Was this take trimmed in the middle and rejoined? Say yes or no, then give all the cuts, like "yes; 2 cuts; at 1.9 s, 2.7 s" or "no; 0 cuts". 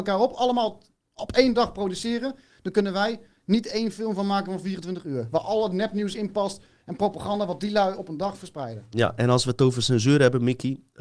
no; 0 cuts